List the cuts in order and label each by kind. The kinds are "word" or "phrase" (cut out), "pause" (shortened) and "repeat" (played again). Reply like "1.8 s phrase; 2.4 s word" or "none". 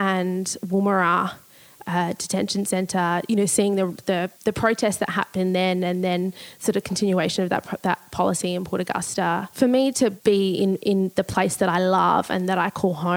4.4 s pause